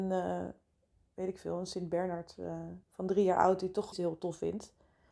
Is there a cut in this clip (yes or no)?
yes